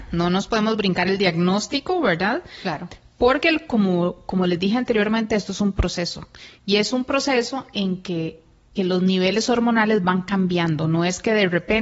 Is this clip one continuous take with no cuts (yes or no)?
no